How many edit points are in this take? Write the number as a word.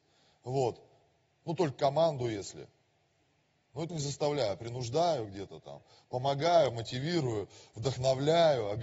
one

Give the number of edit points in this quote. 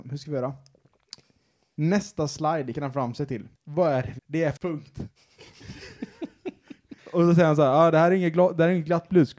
five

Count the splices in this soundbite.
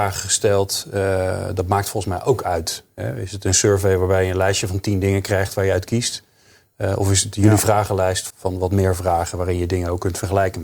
one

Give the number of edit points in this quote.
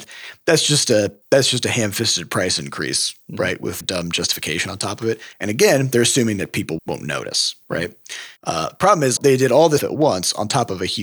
seven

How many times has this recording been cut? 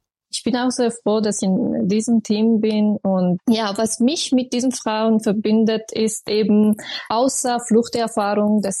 three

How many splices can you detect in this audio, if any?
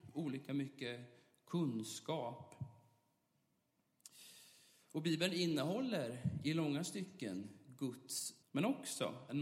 one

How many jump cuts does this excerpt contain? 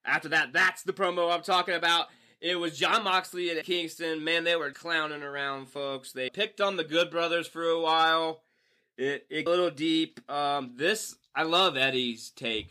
four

